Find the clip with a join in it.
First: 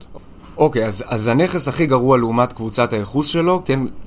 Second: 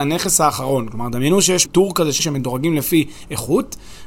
second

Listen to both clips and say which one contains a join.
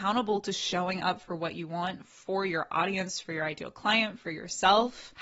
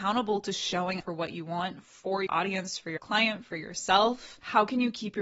second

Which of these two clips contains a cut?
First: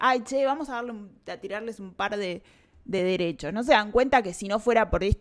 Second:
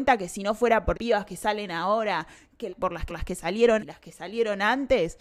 second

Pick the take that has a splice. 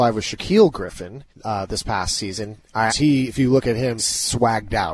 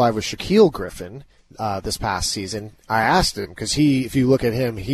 first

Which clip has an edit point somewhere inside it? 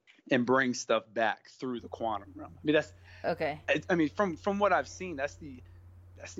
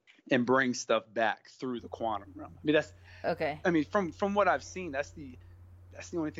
second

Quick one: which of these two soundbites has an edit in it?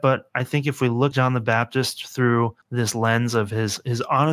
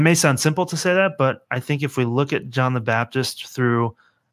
first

